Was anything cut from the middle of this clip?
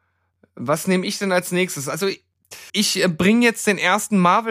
yes; 1 cut; at 2.7 s

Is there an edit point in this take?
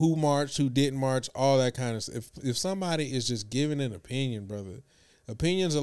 no; 0 cuts

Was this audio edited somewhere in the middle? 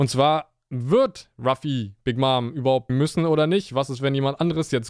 yes; 1 cut; at 2.9 s

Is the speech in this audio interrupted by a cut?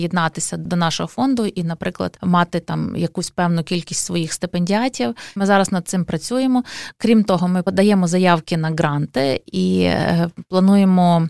no; 0 cuts

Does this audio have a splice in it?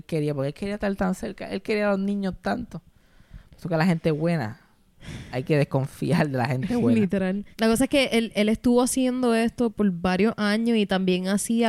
yes; 1 cut; at 7.5 s

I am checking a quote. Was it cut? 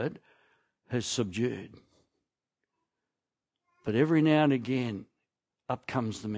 no; 0 cuts

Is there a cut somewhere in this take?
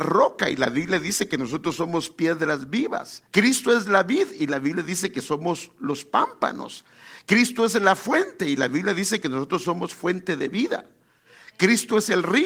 yes; 1 cut; at 3.3 s

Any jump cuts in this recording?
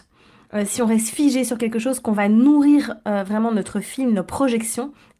no; 0 cuts

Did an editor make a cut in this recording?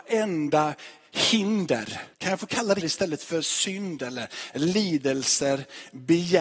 yes; 2 cuts; at 2.1 s, 2.8 s

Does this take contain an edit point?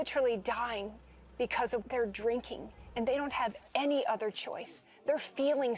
yes; 1 cut; at 1.8 s

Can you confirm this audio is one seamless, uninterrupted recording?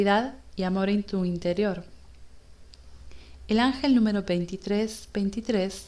yes; 0 cuts

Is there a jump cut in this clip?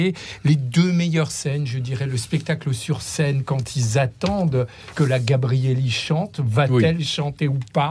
no; 0 cuts

